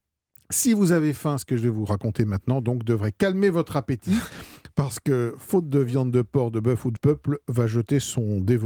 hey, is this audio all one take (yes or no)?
no